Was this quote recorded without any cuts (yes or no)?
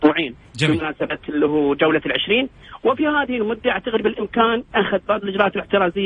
yes